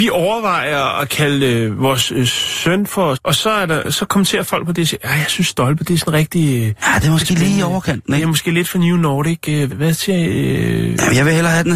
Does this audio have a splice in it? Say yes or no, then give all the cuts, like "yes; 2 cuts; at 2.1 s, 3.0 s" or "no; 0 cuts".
yes; 2 cuts; at 3.1 s, 9.7 s